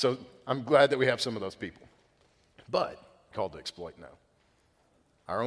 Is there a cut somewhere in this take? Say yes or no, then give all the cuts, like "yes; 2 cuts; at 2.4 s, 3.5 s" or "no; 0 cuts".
yes; 1 cut; at 3.3 s